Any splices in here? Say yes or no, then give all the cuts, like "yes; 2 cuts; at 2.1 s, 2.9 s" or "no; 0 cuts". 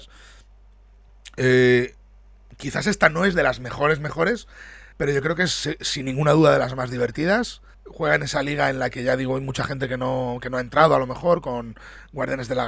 yes; 2 cuts; at 4.9 s, 7.7 s